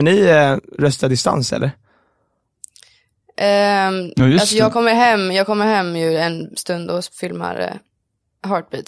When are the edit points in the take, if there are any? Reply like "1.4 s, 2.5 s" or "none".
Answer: none